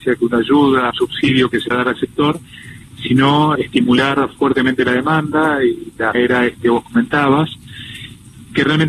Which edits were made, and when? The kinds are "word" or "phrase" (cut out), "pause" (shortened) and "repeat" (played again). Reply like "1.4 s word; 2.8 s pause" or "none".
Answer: 0.9 s word; 1.7 s word; 3.6 s word; 6.1 s word; 6.6 s word